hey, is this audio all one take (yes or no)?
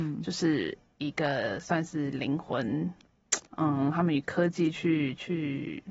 no